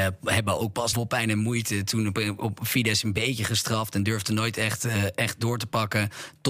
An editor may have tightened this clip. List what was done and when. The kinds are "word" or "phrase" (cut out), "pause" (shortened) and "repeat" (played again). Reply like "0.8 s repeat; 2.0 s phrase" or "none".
0.9 s phrase